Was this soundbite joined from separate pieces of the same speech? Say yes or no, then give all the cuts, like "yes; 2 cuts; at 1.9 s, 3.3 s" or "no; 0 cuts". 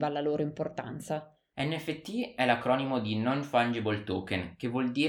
no; 0 cuts